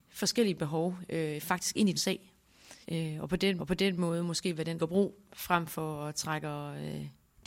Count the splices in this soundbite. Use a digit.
4